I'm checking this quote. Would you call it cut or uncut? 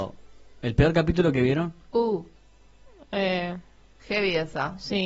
uncut